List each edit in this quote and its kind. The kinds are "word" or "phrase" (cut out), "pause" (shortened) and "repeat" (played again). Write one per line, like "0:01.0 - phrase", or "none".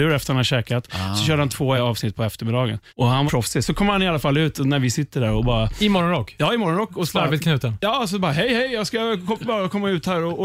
0:01.8 - word
0:02.9 - pause
0:03.3 - phrase